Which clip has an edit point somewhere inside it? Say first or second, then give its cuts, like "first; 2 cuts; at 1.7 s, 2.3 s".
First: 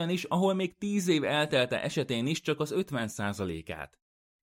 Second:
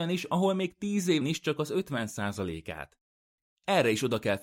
second; 1 cut; at 1.2 s